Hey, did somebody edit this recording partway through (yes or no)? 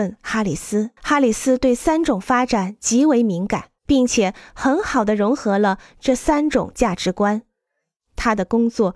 yes